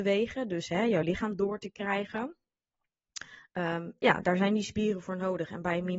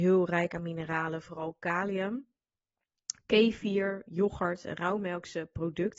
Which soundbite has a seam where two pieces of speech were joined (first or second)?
second